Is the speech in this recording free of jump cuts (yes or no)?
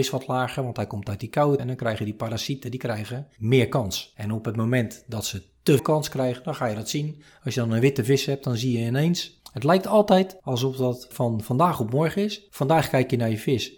no